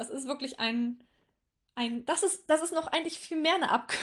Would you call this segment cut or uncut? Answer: uncut